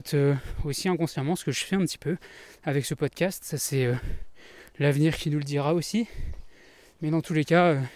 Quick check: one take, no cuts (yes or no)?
yes